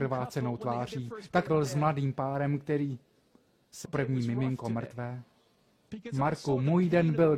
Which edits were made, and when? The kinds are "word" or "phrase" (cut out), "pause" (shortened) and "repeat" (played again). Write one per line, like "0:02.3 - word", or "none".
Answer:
0:01.5 - word
0:03.8 - word